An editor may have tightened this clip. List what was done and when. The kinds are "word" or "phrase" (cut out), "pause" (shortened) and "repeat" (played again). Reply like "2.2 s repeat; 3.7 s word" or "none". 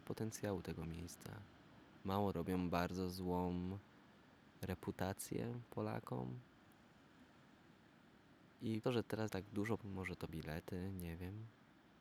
2.3 s word; 8.8 s word; 9.3 s phrase; 9.8 s word; 10.3 s word

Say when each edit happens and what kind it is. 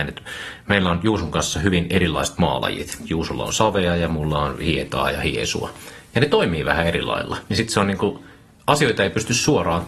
none

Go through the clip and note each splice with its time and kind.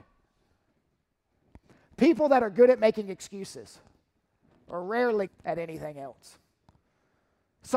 5.3 s word

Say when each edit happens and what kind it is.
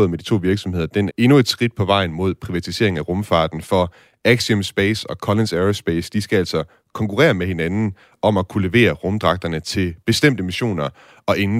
1.1 s word

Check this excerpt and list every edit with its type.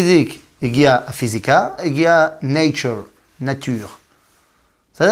1.8 s word

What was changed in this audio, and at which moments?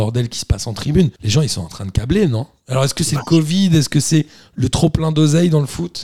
1.2 s pause

